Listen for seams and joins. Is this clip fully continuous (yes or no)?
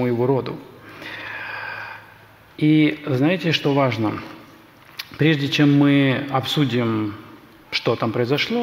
yes